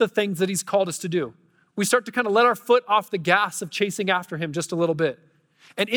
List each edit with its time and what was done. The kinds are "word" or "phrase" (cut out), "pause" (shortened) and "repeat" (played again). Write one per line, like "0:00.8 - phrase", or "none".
none